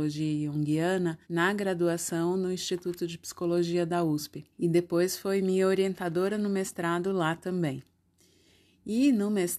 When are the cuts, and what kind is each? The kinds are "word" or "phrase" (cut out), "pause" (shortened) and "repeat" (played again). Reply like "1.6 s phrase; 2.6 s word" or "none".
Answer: 1.2 s pause; 4.5 s pause